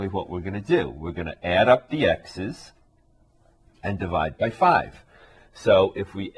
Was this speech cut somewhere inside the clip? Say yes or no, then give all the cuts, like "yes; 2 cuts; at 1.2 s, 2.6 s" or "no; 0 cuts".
no; 0 cuts